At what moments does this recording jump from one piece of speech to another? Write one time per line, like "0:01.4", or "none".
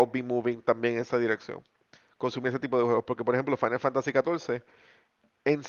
none